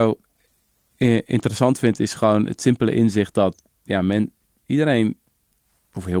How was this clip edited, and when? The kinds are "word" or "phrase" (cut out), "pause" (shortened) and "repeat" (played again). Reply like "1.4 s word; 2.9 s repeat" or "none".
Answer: none